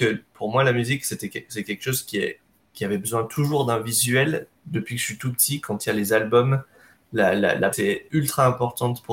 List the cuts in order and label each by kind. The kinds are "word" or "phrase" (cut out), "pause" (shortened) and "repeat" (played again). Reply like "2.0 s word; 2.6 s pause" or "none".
7.7 s word